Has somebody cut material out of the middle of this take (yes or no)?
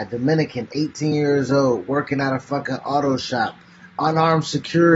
no